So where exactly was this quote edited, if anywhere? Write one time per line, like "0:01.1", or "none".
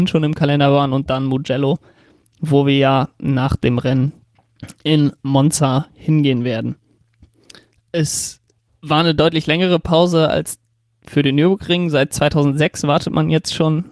none